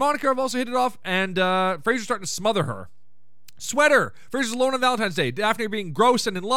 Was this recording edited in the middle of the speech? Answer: no; 0 cuts

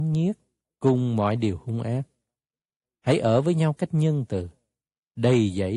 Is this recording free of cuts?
yes; 0 cuts

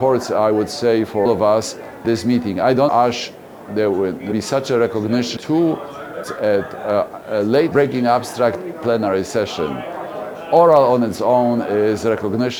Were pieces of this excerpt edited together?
yes; 9 cuts; at 1.3 s, 2.0 s, 2.9 s, 3.7 s, 4.3 s, 5.4 s, 6.2 s, 7.7 s, 8.7 s

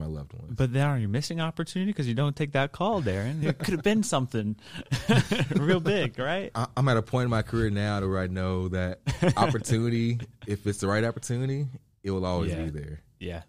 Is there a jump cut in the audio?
no; 0 cuts

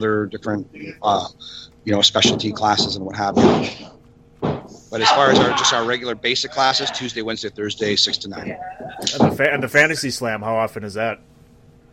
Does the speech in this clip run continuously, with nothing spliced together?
yes; 0 cuts

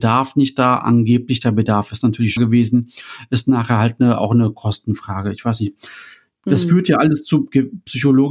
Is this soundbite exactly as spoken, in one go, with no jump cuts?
no; 1 cut; at 2.4 s

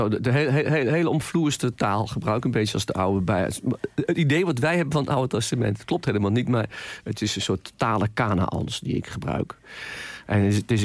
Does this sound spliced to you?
no; 0 cuts

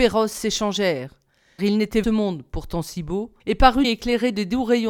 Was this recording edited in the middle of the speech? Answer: yes; 4 cuts; at 1.6 s, 2.0 s, 3.4 s, 3.8 s

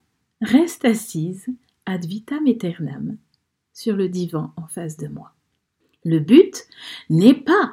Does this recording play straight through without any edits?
yes; 0 cuts

